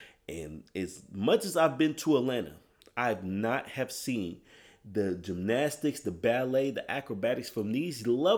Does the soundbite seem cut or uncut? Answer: uncut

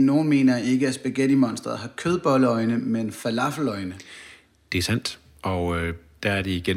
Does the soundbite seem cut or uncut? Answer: uncut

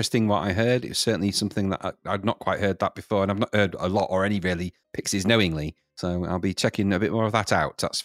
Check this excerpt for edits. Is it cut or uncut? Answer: cut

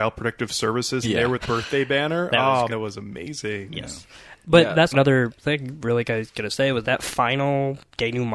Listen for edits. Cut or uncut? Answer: cut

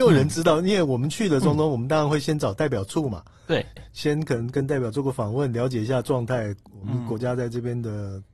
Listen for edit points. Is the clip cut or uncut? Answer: cut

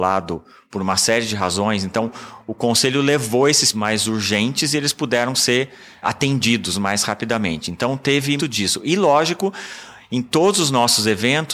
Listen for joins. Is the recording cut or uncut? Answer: cut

